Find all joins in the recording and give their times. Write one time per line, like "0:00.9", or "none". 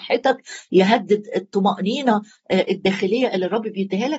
none